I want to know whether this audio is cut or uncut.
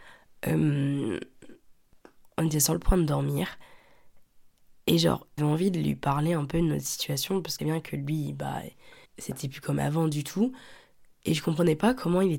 cut